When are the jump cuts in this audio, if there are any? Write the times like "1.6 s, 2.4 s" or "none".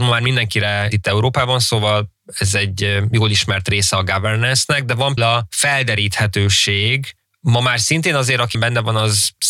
0.9 s, 5.2 s, 7.3 s, 8.5 s